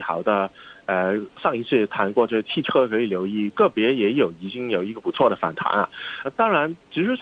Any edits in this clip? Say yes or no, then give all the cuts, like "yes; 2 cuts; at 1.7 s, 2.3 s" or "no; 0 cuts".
yes; 1 cut; at 6.2 s